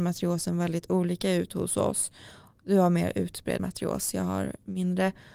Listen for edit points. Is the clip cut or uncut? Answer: cut